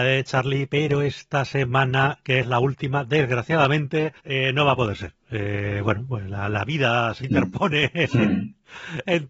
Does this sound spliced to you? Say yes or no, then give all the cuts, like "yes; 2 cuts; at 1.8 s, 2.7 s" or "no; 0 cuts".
yes; 1 cut; at 4.2 s